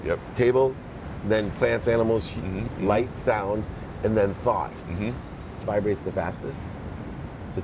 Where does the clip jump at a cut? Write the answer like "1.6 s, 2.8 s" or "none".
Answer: 2.7 s, 5.6 s